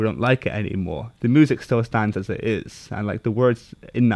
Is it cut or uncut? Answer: uncut